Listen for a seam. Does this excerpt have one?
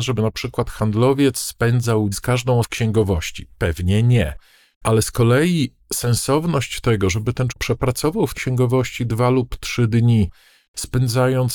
yes; 4 cuts; at 2.1 s, 2.6 s, 7.5 s, 8.3 s

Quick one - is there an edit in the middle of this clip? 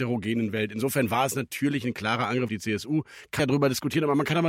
yes; 2 cuts; at 2.5 s, 3.4 s

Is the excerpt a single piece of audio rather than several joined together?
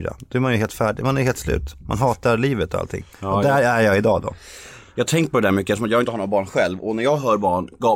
no; 1 cut; at 3.1 s

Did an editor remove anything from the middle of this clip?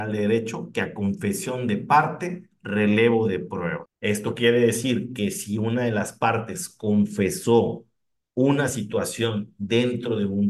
no; 0 cuts

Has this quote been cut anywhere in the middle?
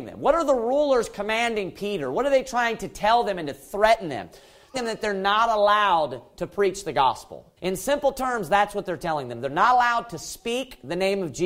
yes; 2 cuts; at 4.7 s, 7.6 s

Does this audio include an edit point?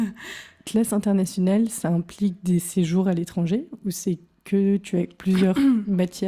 no; 0 cuts

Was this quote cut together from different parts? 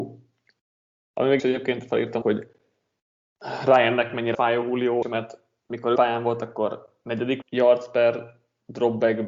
yes; 6 cuts; at 1.4 s, 2.2 s, 4.3 s, 5.0 s, 6.0 s, 7.4 s

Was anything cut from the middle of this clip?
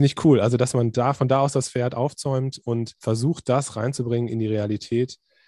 yes; 1 cut; at 3.0 s

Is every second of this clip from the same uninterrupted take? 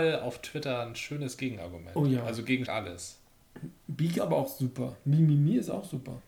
no; 2 cuts; at 2.6 s, 4.2 s

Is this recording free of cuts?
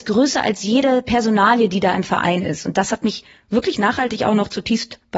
yes; 0 cuts

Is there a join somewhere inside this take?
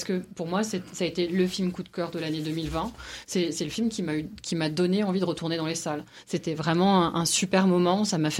no; 0 cuts

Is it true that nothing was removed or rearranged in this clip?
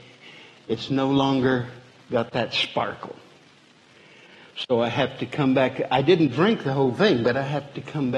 yes; 0 cuts

